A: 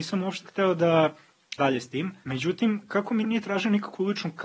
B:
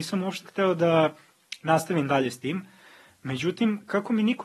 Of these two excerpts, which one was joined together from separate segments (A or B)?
A